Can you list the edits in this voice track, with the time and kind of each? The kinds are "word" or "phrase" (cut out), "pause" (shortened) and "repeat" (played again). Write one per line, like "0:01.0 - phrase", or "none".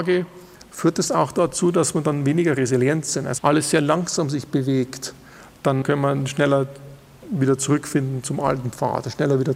0:03.4 - word
0:05.8 - word